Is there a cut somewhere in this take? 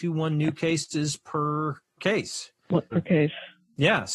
yes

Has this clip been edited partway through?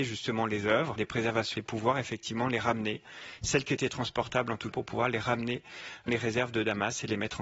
yes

